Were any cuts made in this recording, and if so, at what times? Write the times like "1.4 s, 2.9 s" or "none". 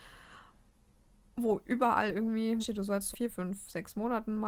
2.6 s, 3.1 s